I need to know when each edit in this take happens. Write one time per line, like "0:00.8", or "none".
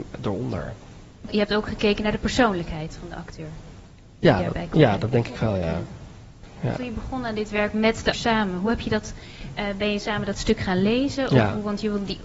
0:08.1

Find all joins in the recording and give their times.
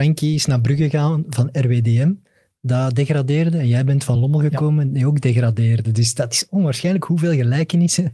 none

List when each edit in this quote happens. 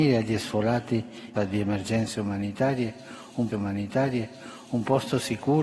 0:01.4
0:03.5

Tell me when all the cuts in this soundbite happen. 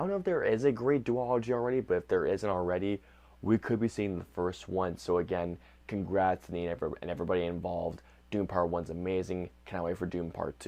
none

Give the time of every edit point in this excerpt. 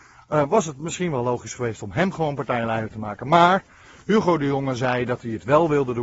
none

